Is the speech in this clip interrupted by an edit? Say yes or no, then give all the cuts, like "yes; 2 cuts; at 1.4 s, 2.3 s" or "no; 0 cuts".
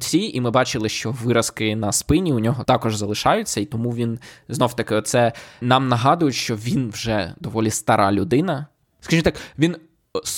yes; 1 cut; at 2.6 s